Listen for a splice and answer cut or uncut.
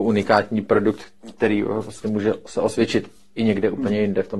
uncut